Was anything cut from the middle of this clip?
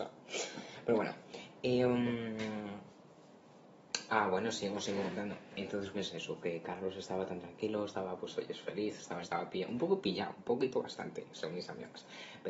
yes; 2 cuts; at 5.9 s, 9.2 s

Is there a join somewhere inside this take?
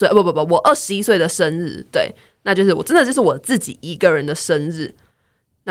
no; 0 cuts

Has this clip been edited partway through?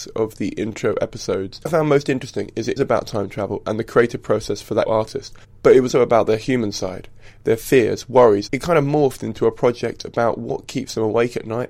yes; 5 cuts; at 1.7 s, 2.8 s, 4.9 s, 5.9 s, 8.5 s

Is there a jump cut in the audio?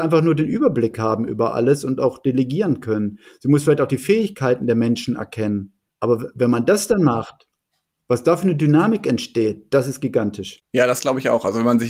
no; 0 cuts

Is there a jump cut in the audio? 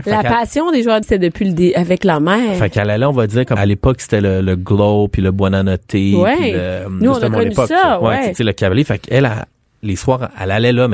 yes; 2 cuts; at 1.0 s, 3.6 s

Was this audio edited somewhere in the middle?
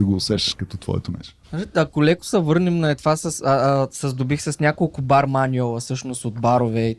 yes; 1 cut; at 1.4 s

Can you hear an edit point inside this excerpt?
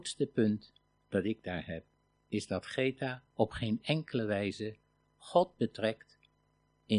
no; 0 cuts

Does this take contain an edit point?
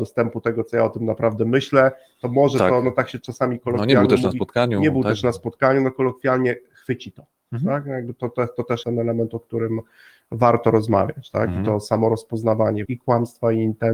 yes; 2 cuts; at 8.8 s, 12.9 s

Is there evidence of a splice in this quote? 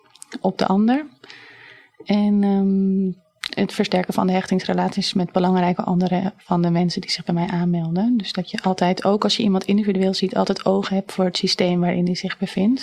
no; 0 cuts

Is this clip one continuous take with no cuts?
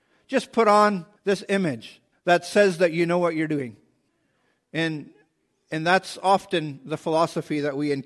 no; 3 cuts; at 1.2 s, 2.1 s, 4.1 s

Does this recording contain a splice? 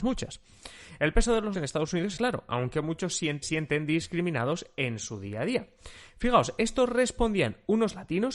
yes; 3 cuts; at 1.5 s, 2.2 s, 3.4 s

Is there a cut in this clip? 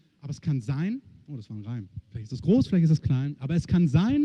no; 0 cuts

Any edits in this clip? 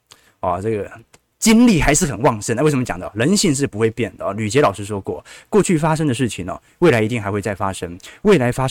no; 0 cuts

